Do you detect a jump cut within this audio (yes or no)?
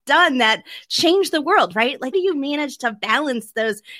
yes